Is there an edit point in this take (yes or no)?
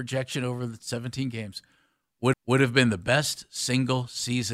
yes